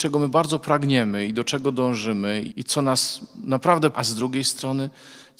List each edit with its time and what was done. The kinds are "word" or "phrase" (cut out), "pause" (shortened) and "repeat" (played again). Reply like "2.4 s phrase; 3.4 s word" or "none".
2.5 s word; 3.9 s word